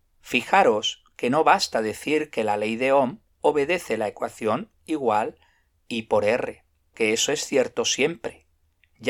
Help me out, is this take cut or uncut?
cut